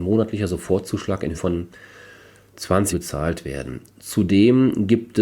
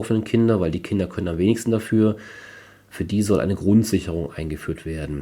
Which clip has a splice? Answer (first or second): first